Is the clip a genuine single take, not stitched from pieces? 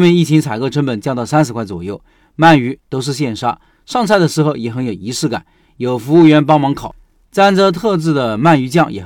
yes; 0 cuts

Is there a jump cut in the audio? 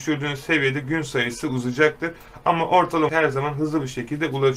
yes; 1 cut; at 3.1 s

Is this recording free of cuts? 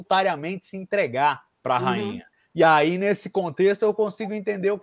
no; 1 cut; at 1.5 s

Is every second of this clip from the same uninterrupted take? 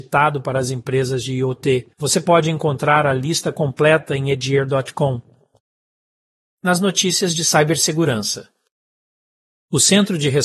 no; 1 cut; at 1.9 s

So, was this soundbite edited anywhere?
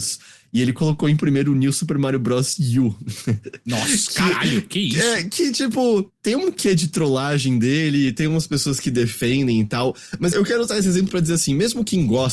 yes; 1 cut; at 10.3 s

